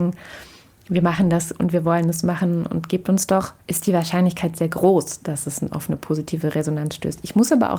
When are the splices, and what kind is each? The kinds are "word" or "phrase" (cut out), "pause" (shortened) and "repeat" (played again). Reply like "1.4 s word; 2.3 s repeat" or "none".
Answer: 3.6 s pause